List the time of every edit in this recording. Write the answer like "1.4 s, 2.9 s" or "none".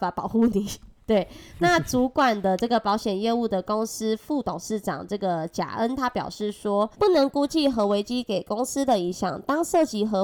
6.9 s